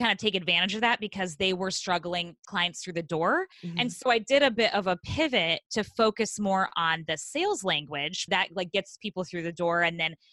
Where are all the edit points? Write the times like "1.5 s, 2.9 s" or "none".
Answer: 2.4 s, 3.5 s, 8.3 s